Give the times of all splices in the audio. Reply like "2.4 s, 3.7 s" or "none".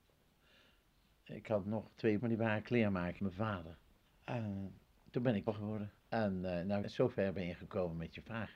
2.2 s, 3.2 s, 4.1 s, 5.5 s, 6.0 s, 6.8 s